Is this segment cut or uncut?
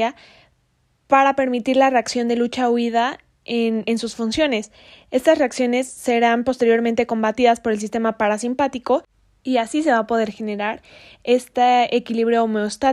uncut